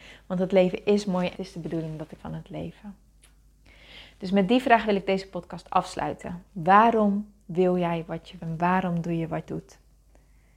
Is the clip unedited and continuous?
no; 5 cuts; at 1.3 s, 2.2 s, 6.5 s, 8.4 s, 9.5 s

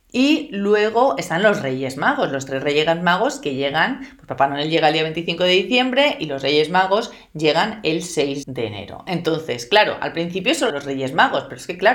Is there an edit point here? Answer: yes; 2 cuts; at 8.4 s, 10.7 s

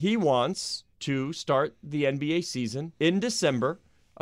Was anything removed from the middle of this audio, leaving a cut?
yes; 2 cuts; at 0.9 s, 2.9 s

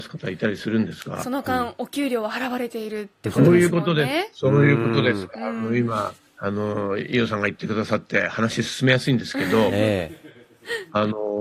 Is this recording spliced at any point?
yes; 1 cut; at 6.3 s

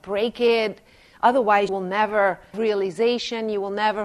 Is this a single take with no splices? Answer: no; 2 cuts; at 1.7 s, 2.5 s

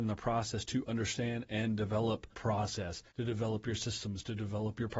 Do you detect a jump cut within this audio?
yes; 2 cuts; at 2.3 s, 3.1 s

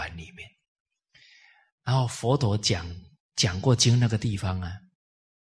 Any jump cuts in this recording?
no; 0 cuts

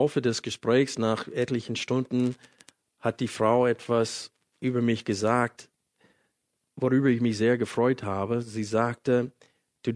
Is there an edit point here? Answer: yes; 1 cut; at 4.5 s

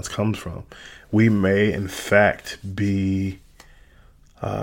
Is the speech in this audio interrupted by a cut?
no; 0 cuts

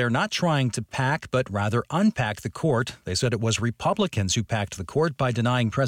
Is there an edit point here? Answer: no; 0 cuts

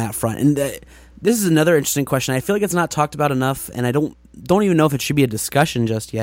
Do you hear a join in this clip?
no; 0 cuts

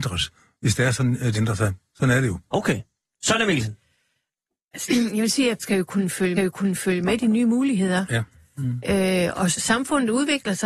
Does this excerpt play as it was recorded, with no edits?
no; 5 cuts; at 1.3 s, 4.9 s, 5.6 s, 6.4 s, 9.5 s

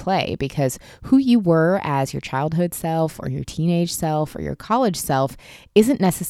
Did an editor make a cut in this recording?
no; 0 cuts

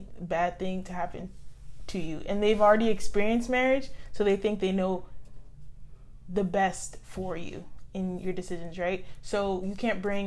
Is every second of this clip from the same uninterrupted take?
yes; 0 cuts

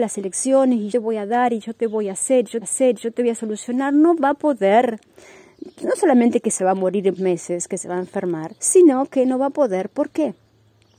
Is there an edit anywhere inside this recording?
yes; 4 cuts; at 0.9 s, 2.6 s, 7.2 s, 8.6 s

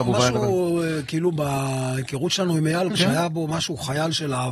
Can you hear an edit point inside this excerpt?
yes; 1 cut; at 2.9 s

